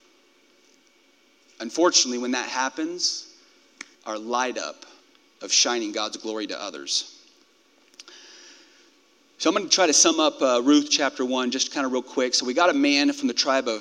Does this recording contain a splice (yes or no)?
yes